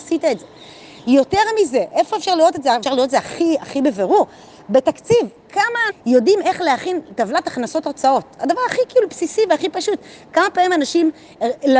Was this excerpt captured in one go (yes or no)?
no